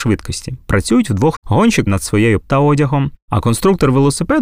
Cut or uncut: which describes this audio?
cut